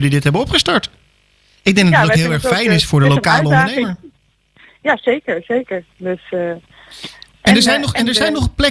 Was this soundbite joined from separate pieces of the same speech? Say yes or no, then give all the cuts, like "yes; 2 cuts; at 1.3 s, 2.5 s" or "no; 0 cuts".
no; 0 cuts